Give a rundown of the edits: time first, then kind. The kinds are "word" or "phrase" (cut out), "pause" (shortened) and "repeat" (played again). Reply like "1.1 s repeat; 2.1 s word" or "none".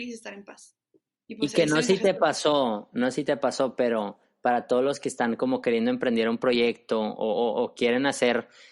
none